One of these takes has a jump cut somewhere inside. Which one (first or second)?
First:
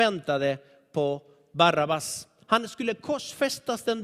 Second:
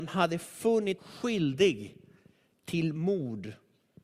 second